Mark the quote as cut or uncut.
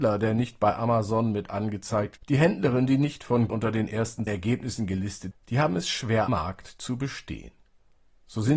cut